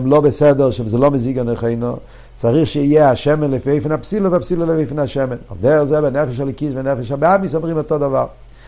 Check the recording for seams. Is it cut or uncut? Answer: uncut